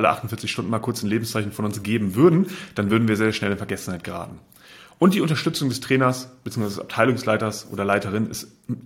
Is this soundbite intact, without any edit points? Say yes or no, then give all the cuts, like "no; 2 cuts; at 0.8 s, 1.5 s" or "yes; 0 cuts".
yes; 0 cuts